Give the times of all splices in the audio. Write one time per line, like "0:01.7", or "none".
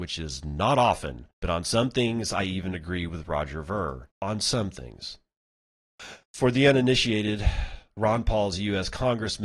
0:01.3
0:04.1
0:06.2